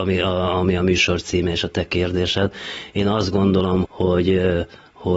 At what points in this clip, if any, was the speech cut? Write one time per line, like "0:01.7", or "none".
0:03.8